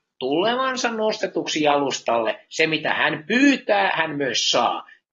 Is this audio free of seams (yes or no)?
yes